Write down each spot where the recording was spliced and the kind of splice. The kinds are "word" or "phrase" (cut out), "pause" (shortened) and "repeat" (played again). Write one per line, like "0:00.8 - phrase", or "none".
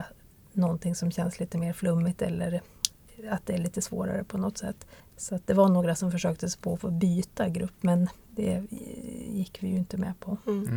0:05.0 - pause